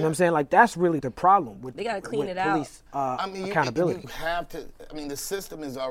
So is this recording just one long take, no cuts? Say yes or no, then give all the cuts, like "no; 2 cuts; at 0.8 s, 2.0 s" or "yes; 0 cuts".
no; 3 cuts; at 1.0 s, 2.9 s, 4.0 s